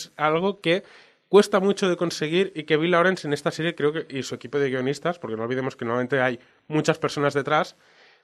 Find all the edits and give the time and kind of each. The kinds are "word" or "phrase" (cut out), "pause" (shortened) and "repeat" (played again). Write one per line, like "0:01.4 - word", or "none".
none